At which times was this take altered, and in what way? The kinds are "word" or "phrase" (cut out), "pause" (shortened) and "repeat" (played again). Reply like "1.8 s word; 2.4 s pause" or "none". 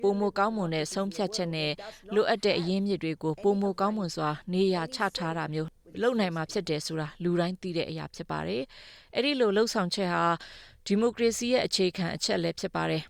none